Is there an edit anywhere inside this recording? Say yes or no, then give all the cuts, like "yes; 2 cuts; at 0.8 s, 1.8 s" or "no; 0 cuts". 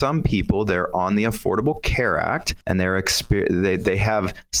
yes; 1 cut; at 2.6 s